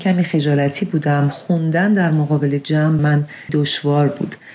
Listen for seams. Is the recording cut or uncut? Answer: cut